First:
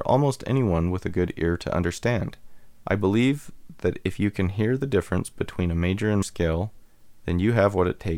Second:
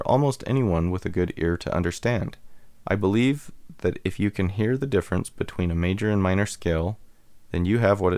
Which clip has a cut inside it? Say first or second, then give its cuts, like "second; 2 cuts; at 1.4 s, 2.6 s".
first; 1 cut; at 6.2 s